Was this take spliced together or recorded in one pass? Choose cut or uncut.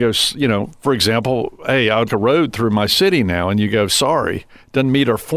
cut